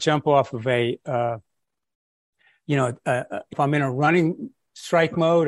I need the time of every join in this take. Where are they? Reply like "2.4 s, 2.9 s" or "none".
3.5 s